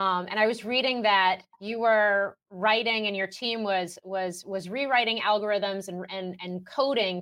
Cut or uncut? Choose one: cut